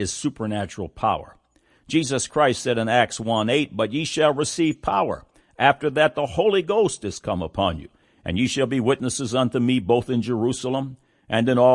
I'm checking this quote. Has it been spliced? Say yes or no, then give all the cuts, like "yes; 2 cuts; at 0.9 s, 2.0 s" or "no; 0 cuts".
no; 0 cuts